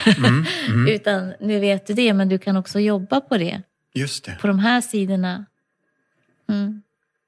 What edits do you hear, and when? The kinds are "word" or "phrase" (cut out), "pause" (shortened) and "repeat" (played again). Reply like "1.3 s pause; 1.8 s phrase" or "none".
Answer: none

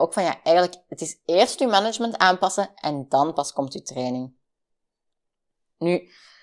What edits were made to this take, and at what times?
none

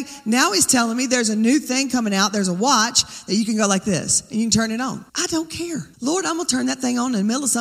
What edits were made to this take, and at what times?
5.1 s pause; 5.9 s pause

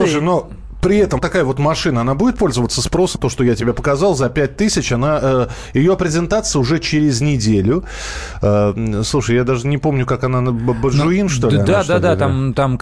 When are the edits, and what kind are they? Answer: 1.2 s word; 3.2 s word; 6.5 s word

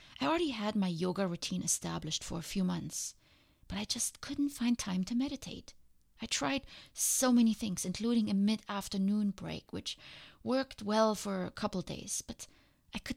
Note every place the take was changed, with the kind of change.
none

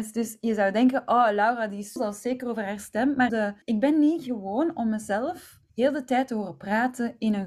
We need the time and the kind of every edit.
2.0 s word; 3.3 s phrase; 3.6 s pause; 5.7 s pause

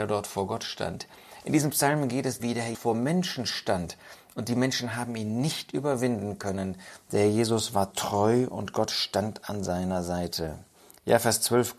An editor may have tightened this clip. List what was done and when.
2.4 s word; 2.7 s word

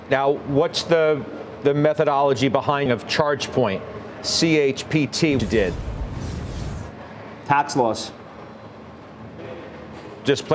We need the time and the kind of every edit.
2.9 s phrase; 5.4 s word

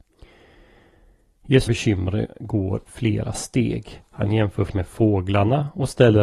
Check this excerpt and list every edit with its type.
1.7 s phrase; 2.9 s word; 4.1 s pause; 4.7 s word

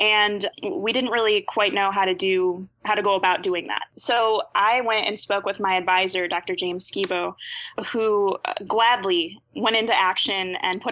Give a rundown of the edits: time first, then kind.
none

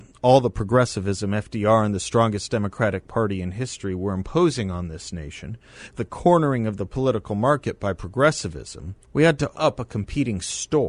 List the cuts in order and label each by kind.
6.0 s phrase; 9.0 s pause; 9.5 s word

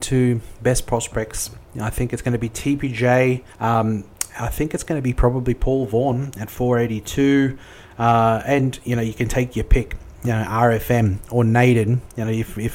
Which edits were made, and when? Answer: 3.5 s pause

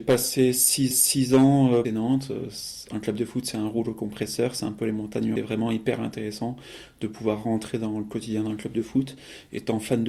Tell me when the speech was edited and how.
0.9 s repeat; 1.8 s phrase; 5.4 s phrase

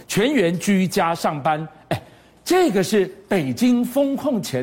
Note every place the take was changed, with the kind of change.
none

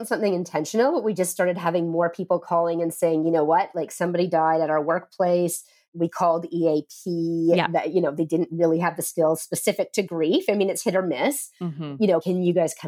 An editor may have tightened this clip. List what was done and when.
none

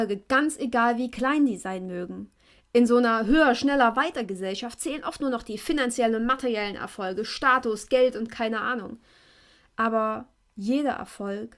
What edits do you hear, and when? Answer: none

